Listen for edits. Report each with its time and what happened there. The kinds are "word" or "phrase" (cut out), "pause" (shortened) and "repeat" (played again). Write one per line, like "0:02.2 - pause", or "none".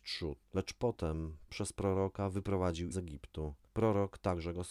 0:01.5 - word
0:02.9 - word